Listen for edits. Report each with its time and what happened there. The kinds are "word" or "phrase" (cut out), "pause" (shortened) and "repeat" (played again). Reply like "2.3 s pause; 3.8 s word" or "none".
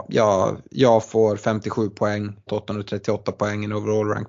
2.5 s word